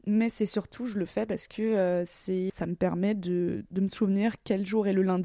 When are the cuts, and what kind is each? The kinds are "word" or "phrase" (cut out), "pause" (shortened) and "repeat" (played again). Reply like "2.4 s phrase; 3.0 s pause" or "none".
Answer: 2.5 s word